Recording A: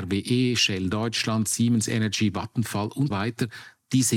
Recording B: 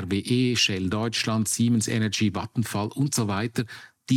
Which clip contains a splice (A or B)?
A